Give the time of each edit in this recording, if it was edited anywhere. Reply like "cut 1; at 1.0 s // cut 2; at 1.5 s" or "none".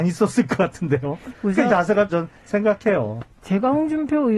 cut 1; at 1.7 s // cut 2; at 2.1 s